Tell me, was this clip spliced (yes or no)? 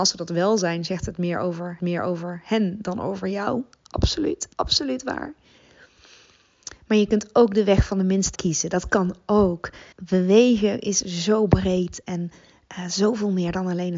yes